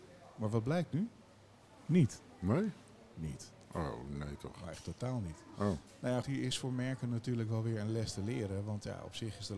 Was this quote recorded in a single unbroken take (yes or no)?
no